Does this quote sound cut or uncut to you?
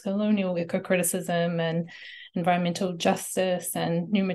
uncut